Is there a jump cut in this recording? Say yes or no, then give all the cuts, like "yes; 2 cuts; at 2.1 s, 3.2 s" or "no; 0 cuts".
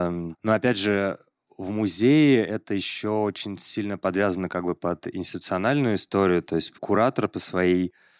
no; 0 cuts